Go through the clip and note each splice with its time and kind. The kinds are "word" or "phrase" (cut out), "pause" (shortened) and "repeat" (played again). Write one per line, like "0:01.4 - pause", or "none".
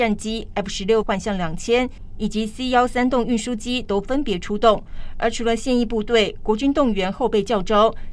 0:01.0 - word